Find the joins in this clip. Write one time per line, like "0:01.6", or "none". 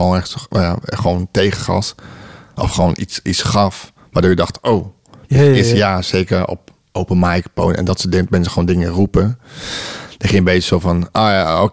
none